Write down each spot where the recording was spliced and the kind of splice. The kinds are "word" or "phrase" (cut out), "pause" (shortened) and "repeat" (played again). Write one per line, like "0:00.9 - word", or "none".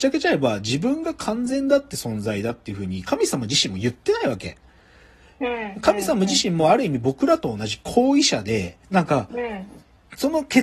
0:08.8 - pause